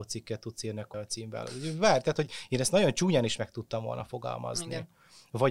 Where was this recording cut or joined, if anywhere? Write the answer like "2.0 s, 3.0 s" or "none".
0.9 s